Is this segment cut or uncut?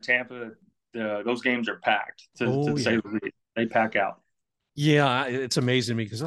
uncut